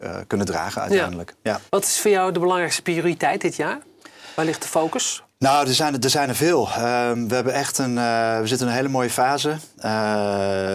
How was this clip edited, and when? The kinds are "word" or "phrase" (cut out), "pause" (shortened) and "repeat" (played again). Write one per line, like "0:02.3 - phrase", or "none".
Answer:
0:01.7 - pause